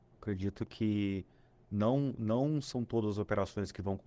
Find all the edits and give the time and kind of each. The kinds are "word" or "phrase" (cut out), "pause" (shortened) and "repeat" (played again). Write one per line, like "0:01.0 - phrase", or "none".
none